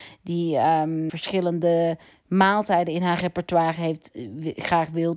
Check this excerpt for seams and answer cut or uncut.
cut